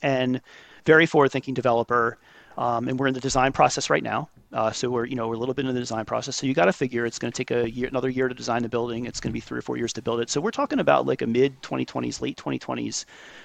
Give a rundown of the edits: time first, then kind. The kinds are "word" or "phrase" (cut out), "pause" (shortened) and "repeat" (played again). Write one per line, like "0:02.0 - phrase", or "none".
none